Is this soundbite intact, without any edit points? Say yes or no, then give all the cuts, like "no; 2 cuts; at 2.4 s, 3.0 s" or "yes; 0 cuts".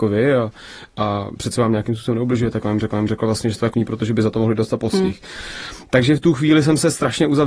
no; 2 cuts; at 2.9 s, 3.7 s